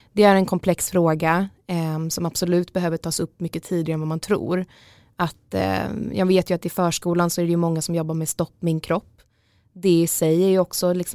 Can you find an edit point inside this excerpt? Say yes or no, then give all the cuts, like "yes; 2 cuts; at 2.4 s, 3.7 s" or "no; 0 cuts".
no; 0 cuts